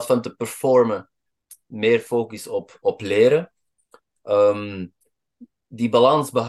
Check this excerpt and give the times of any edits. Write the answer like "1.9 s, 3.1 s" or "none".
none